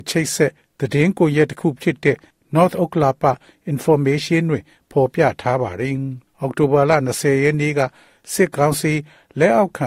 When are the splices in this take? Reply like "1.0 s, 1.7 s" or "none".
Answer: 6.3 s